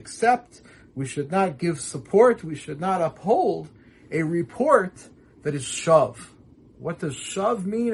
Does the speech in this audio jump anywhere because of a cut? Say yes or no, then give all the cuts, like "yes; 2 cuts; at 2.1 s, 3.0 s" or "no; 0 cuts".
no; 0 cuts